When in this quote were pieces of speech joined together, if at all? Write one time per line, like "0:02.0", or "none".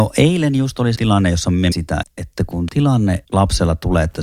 0:01.0
0:01.7
0:02.0
0:02.7
0:03.2